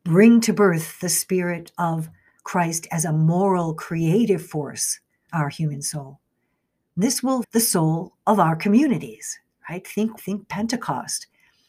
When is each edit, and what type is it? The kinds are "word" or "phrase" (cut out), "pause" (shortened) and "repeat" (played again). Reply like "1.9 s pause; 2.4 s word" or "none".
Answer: 5.3 s word; 7.4 s word; 10.2 s word